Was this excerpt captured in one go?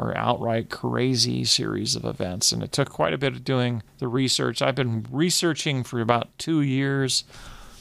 no; 1 cut; at 3.9 s

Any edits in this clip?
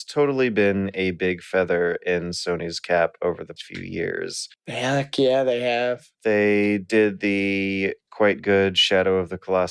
yes; 2 cuts; at 3.6 s, 6.1 s

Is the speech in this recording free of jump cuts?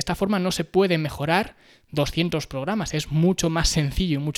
yes; 0 cuts

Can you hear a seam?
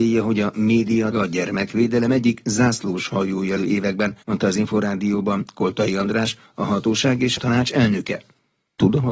yes; 4 cuts; at 1.1 s, 3.6 s, 4.2 s, 7.4 s

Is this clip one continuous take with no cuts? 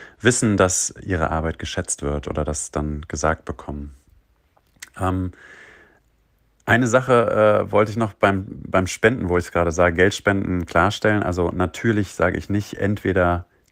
yes; 0 cuts

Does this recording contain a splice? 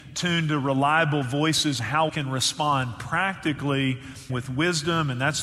yes; 3 cuts; at 1.8 s, 2.1 s, 4.3 s

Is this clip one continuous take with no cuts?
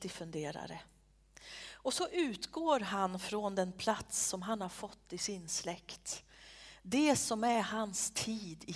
yes; 0 cuts

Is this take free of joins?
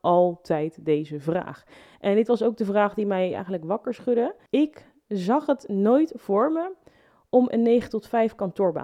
yes; 0 cuts

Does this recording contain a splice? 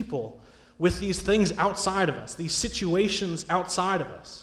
no; 0 cuts

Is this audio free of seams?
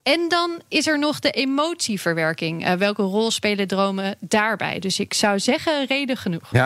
yes; 0 cuts

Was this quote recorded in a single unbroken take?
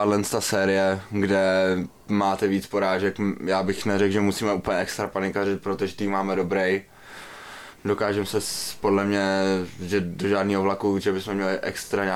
yes; 0 cuts

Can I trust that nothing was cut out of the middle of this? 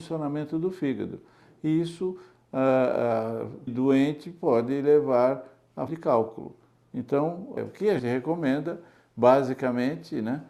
no; 4 cuts; at 3.7 s, 5.9 s, 7.6 s, 8.0 s

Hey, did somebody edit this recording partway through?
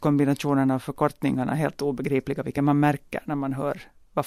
no; 0 cuts

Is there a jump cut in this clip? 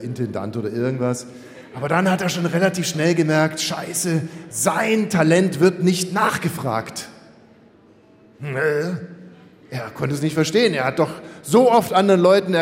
no; 0 cuts

